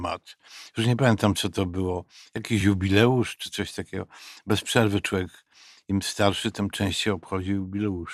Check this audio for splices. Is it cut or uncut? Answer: uncut